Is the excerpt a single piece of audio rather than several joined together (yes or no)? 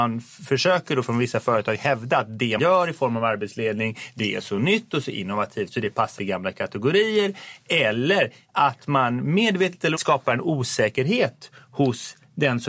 no